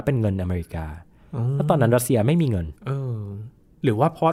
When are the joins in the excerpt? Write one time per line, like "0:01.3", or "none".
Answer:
0:02.8